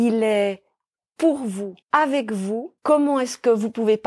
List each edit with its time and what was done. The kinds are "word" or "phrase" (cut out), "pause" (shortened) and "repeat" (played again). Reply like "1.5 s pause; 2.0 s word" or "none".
1.8 s pause; 2.8 s pause